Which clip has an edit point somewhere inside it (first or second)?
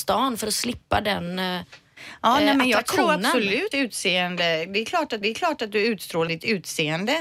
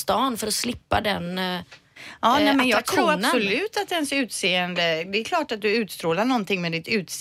first